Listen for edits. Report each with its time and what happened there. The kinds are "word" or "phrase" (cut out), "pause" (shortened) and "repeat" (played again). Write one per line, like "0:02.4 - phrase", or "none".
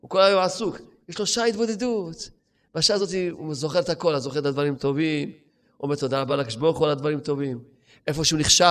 none